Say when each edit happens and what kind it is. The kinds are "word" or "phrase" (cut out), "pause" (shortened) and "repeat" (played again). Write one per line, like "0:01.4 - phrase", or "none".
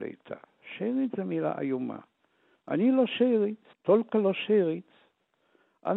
0:03.7 - pause